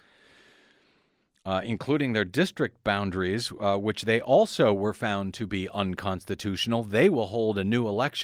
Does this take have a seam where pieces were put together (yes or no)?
no